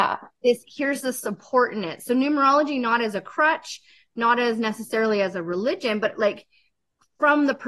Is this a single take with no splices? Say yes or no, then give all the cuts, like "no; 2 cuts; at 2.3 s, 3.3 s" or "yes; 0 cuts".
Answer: yes; 0 cuts